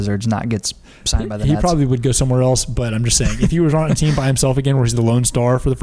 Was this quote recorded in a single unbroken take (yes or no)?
yes